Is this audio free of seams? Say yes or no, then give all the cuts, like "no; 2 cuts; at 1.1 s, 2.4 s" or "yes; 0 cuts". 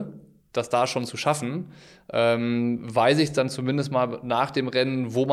yes; 0 cuts